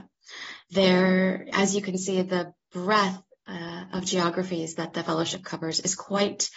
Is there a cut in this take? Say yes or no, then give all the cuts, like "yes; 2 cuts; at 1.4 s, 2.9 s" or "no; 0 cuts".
no; 0 cuts